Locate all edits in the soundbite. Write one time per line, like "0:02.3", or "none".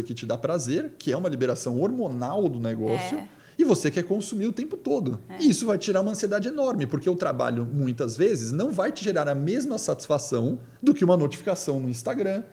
0:03.4
0:10.8